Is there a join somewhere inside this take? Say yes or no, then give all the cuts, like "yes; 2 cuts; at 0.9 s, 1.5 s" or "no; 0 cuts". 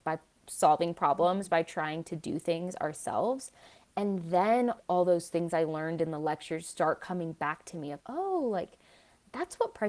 yes; 2 cuts; at 4.8 s, 8.0 s